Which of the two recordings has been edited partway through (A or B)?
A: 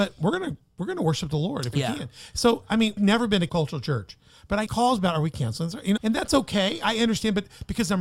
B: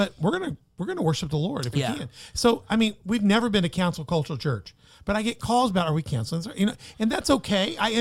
A